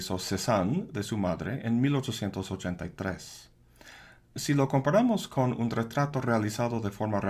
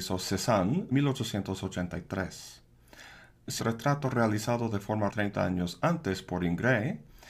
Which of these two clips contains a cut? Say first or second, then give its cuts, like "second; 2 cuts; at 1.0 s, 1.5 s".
second; 3 cuts; at 0.9 s, 3.6 s, 5.1 s